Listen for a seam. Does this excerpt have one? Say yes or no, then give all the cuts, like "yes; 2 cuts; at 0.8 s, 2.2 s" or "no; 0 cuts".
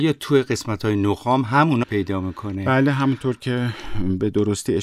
yes; 1 cut; at 1.8 s